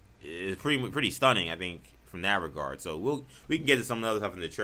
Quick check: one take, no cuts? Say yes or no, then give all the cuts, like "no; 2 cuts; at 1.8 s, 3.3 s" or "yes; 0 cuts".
yes; 0 cuts